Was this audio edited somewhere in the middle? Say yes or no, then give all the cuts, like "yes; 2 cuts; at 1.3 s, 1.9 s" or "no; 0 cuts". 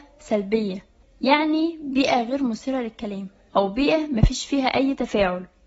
yes; 1 cut; at 1.0 s